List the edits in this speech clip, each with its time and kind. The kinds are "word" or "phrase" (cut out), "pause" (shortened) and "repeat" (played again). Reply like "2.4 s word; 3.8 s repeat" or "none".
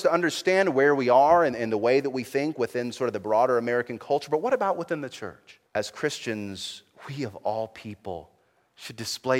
5.7 s pause